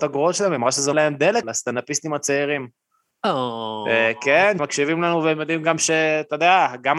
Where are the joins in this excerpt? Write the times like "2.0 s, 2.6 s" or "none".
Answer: 0.9 s, 1.4 s, 4.6 s